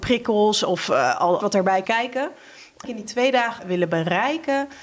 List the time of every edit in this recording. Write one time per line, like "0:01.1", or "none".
0:01.4
0:01.8
0:02.8
0:03.6